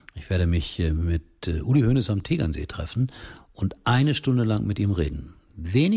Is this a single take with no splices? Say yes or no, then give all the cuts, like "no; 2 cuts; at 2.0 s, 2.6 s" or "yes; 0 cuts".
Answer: yes; 0 cuts